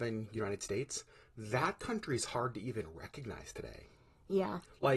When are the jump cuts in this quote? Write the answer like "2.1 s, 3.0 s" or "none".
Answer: none